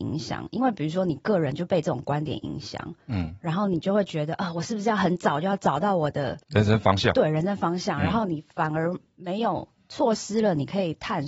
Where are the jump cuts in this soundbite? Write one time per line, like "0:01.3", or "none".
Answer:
0:06.4

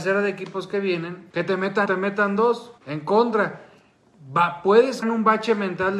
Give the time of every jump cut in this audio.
0:01.3
0:01.9
0:02.8
0:05.0

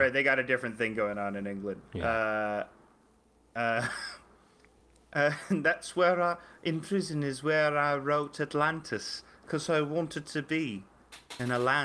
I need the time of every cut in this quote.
none

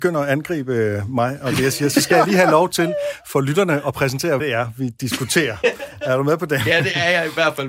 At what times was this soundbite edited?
0:04.4

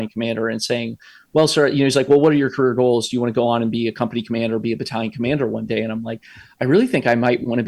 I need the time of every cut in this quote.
none

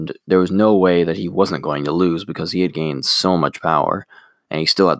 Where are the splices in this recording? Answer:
none

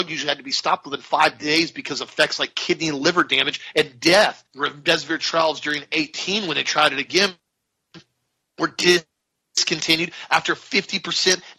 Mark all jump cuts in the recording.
0:04.5
0:09.4

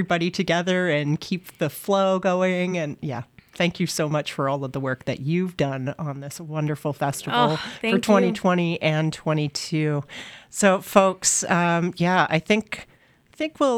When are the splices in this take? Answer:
none

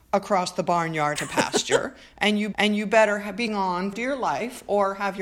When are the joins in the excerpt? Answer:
0:01.2
0:02.5
0:03.5
0:03.9

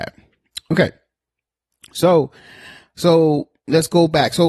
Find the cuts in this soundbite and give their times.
none

